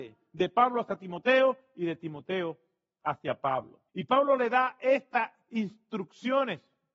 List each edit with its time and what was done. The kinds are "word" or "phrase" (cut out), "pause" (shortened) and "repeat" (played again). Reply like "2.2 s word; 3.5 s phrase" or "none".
3.9 s pause